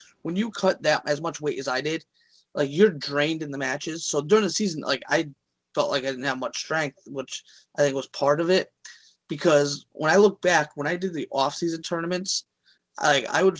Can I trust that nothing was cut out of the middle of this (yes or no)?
yes